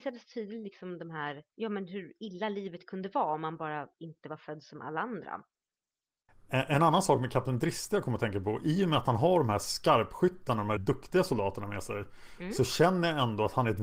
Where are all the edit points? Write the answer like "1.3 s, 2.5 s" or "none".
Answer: 1.5 s, 3.9 s, 10.8 s